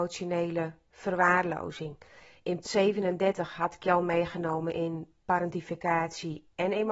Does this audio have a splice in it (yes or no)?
yes